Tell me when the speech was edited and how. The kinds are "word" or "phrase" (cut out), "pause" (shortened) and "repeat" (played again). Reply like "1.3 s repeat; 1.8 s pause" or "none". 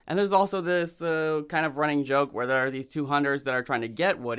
none